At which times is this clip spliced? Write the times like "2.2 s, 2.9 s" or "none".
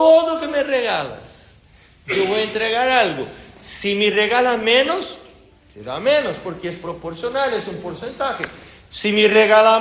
none